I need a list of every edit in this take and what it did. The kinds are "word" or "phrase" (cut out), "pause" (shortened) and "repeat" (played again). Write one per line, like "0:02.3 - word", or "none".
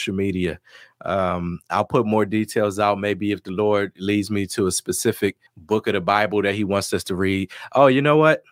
0:05.5 - pause